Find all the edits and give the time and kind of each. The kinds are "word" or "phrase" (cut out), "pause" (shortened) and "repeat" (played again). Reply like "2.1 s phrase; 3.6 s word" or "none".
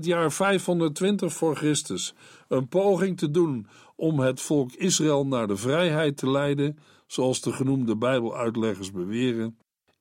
none